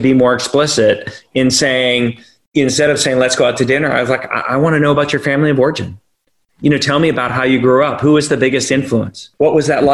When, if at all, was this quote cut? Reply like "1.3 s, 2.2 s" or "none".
none

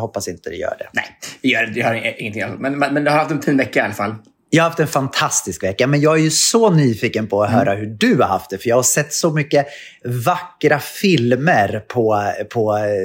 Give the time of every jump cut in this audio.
none

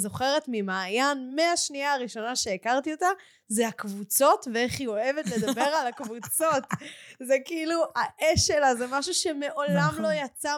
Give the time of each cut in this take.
none

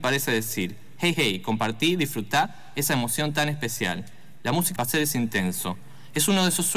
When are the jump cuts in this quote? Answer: 1.1 s, 4.8 s

